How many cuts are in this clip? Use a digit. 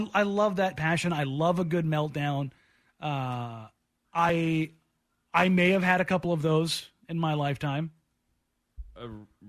0